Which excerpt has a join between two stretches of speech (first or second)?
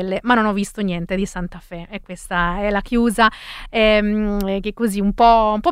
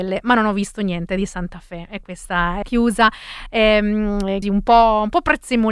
second